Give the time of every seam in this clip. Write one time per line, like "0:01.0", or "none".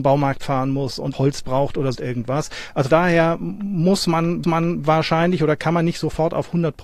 0:01.1
0:01.9
0:02.9
0:04.4